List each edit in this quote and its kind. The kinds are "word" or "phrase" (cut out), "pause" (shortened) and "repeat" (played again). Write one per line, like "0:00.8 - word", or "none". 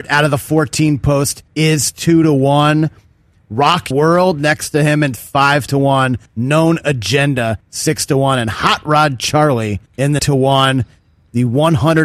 0:01.5 - pause
0:03.9 - word
0:05.2 - phrase
0:06.3 - pause
0:07.6 - pause
0:09.9 - pause
0:10.2 - phrase